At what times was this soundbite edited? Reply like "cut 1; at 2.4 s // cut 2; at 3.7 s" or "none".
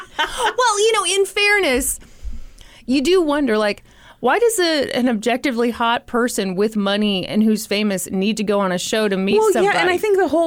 none